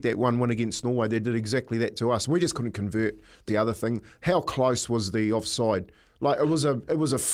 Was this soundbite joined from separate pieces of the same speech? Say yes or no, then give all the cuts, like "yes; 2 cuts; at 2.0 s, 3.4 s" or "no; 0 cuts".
yes; 1 cut; at 3.5 s